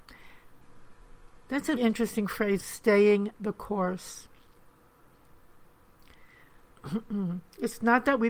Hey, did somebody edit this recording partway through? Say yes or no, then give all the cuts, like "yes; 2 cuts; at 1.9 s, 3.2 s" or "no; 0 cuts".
yes; 2 cuts; at 1.8 s, 2.6 s